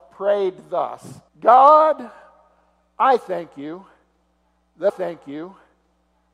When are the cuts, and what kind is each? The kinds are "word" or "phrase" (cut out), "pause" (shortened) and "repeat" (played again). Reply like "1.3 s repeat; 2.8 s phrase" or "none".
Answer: 1.3 s pause; 4.9 s repeat